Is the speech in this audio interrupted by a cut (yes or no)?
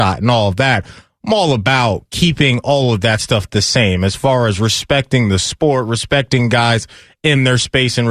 no